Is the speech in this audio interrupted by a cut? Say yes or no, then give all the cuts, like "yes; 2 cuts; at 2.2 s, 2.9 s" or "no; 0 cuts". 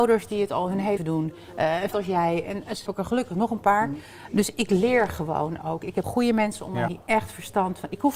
yes; 5 cuts; at 1.0 s, 1.9 s, 2.9 s, 6.0 s, 6.9 s